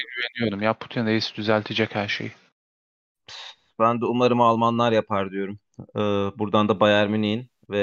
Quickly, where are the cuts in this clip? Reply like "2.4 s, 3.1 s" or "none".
none